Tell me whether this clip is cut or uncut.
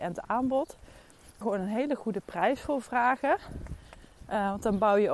cut